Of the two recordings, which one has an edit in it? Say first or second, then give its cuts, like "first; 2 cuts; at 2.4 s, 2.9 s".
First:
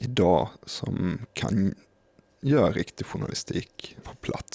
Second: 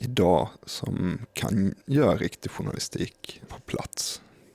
second; 1 cut; at 1.8 s